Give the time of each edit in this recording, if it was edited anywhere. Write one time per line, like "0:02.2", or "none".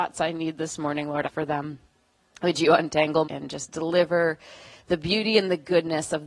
0:01.2
0:03.2